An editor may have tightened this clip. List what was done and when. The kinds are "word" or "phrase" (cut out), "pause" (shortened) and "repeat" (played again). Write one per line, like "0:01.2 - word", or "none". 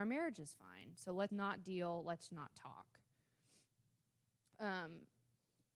0:01.3 - word
0:02.3 - word

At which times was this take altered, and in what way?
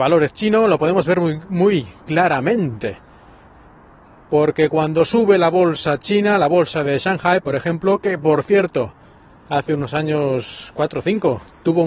none

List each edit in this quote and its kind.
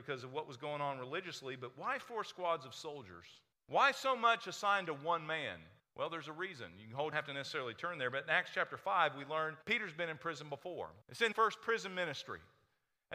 0:03.5 - pause
0:05.8 - pause
0:07.1 - phrase
0:09.6 - pause
0:11.0 - pause
0:11.3 - word

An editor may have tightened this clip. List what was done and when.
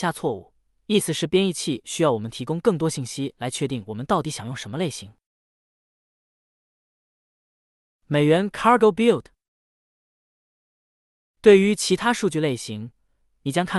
none

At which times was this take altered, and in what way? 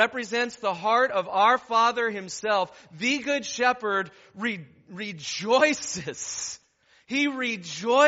none

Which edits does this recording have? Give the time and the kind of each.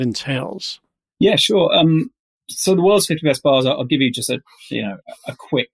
none

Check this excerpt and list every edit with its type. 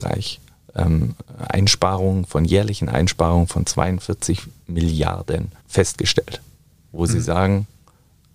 0:05.6 - pause

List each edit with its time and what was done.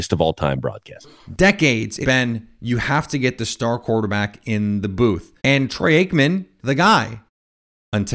0:02.0 - word
0:05.4 - pause
0:06.6 - word

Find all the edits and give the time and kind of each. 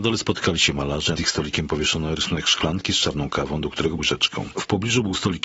0:01.2 - word
0:04.0 - phrase

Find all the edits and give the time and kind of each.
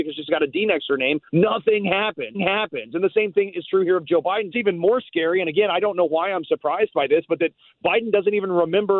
0:01.3 - pause
0:02.3 - repeat
0:04.5 - phrase

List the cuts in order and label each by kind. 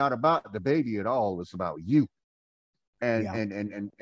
none

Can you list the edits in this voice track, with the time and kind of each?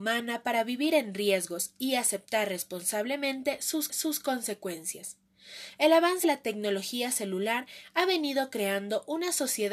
0:03.9 - repeat
0:06.2 - word

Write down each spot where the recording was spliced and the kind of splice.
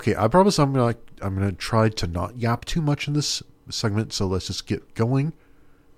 none

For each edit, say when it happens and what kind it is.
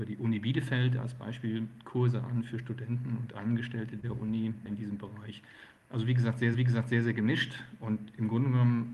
0:06.5 - repeat

